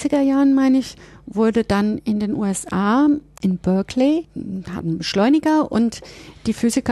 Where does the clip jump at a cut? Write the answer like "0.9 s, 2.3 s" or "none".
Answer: none